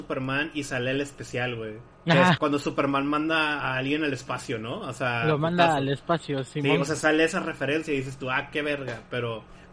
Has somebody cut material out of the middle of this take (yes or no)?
yes